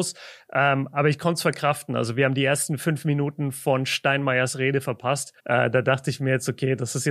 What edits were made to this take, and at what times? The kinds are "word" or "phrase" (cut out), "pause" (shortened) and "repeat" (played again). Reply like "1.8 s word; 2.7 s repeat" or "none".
5.4 s pause